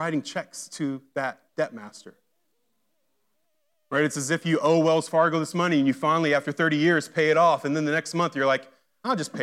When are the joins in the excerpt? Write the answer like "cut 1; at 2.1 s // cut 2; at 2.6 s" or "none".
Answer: none